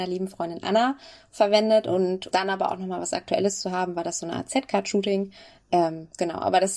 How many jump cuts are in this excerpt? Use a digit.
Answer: 1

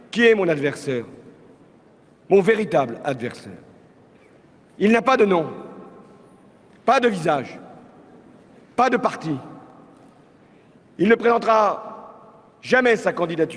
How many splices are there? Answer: 0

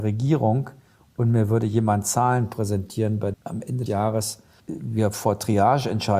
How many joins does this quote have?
3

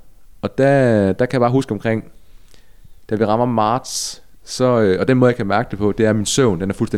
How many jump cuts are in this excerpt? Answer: 0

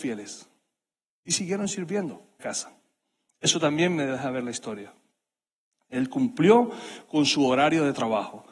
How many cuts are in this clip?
1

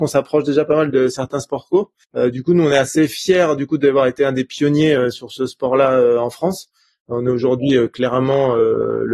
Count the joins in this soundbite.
0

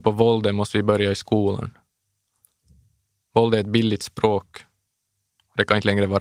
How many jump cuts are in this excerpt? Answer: 0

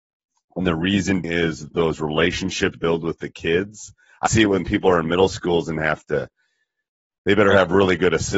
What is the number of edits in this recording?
4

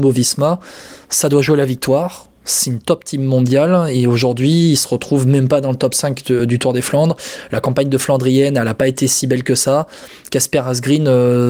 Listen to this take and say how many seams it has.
0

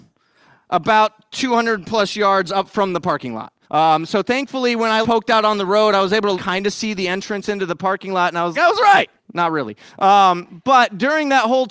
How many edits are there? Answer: 5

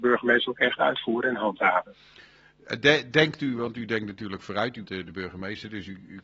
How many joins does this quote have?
1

